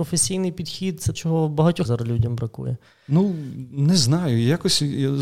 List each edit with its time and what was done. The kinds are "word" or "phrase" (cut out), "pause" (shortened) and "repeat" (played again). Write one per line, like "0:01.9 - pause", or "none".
0:01.1 - word
0:01.8 - word